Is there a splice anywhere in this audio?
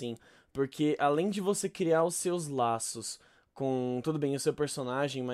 no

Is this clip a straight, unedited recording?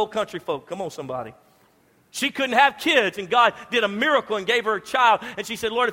yes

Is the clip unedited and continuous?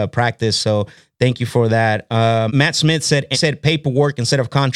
no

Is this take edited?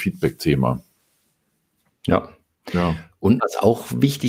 yes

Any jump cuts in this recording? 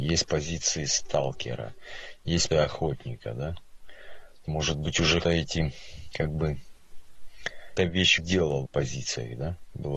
yes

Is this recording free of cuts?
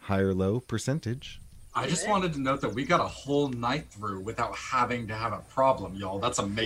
no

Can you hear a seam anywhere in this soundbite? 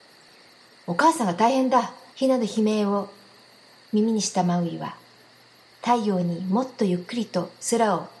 yes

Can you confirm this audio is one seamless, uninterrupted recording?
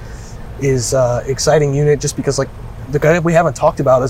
yes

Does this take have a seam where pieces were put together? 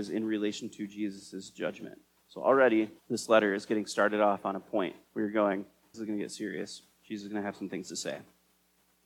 yes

